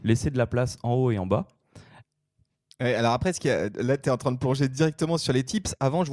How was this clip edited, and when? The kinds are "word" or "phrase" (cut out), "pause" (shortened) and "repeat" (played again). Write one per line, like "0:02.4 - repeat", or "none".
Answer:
none